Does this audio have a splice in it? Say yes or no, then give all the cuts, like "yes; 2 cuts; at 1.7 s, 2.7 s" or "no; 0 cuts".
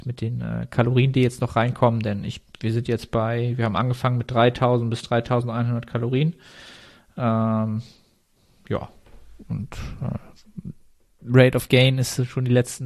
no; 0 cuts